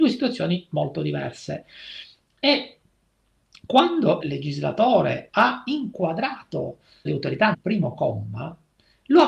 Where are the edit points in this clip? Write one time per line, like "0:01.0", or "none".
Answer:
0:04.2
0:07.1
0:07.5